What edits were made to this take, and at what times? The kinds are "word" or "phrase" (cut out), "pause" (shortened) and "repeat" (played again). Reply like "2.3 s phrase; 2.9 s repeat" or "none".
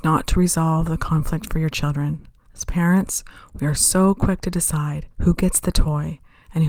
2.5 s pause; 5.1 s pause